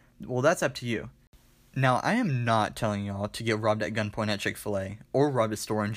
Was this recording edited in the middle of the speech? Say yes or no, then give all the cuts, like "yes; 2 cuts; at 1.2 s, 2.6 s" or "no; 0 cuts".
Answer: no; 0 cuts